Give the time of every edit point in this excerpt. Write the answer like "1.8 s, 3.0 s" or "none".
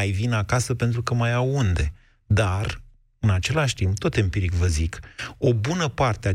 none

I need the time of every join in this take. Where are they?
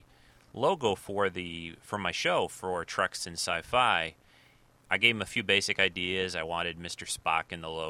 none

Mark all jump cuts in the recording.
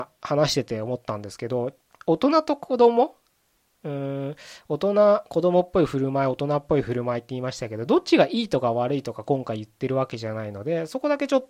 1.8 s

